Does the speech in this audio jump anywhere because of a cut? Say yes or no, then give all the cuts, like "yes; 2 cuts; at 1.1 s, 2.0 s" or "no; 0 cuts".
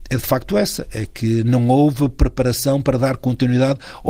no; 0 cuts